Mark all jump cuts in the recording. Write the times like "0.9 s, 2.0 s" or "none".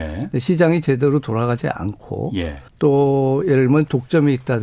2.7 s